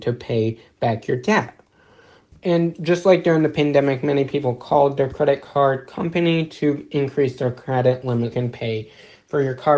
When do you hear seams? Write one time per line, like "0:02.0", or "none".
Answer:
0:08.3